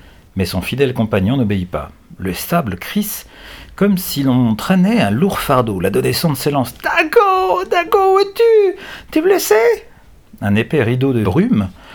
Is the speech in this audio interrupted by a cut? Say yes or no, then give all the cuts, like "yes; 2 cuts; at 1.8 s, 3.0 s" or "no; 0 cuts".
no; 0 cuts